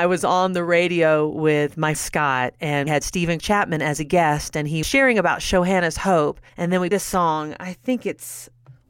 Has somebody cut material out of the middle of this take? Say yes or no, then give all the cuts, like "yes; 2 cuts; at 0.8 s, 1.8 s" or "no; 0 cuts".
yes; 6 cuts; at 1.9 s, 2.9 s, 3.4 s, 4.8 s, 6.5 s, 6.9 s